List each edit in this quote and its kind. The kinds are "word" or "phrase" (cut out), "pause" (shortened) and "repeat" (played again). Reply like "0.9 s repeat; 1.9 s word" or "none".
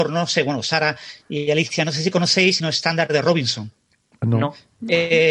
2.6 s phrase